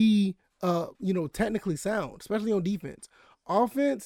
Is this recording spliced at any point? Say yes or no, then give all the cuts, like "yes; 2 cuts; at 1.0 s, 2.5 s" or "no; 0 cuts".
yes; 1 cut; at 0.9 s